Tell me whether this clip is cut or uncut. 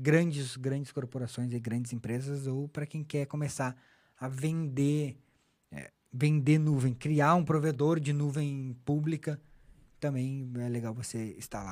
uncut